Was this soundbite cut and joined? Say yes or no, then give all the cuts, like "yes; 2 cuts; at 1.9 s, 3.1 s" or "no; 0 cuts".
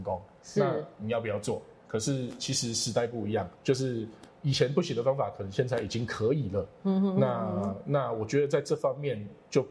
yes; 1 cut; at 3.5 s